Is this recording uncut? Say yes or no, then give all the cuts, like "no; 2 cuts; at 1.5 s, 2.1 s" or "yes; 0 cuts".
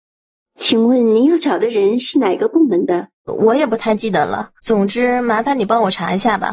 no; 2 cuts; at 3.2 s, 4.6 s